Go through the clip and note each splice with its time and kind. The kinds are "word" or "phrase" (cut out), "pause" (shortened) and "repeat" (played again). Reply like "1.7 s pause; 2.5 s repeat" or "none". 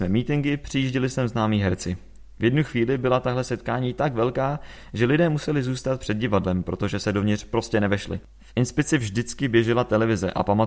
none